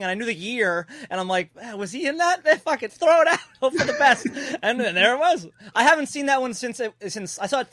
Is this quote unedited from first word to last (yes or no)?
no